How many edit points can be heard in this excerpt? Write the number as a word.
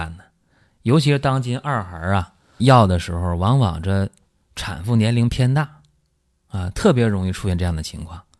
one